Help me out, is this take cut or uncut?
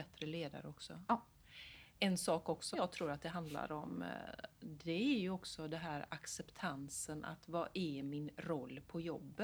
cut